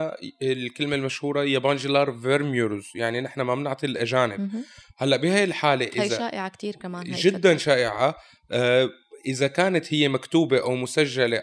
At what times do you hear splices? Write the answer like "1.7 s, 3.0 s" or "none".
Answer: none